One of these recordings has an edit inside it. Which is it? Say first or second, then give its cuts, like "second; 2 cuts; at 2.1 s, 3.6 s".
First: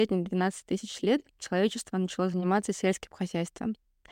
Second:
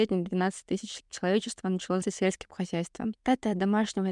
second; 3 cuts; at 1.0 s, 2.0 s, 3.2 s